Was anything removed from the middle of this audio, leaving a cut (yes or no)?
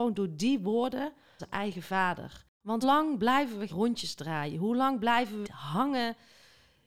yes